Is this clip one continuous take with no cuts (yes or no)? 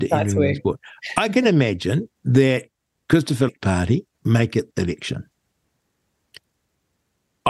no